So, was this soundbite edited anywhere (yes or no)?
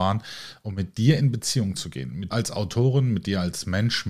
yes